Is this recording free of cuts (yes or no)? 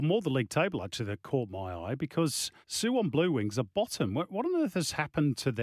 no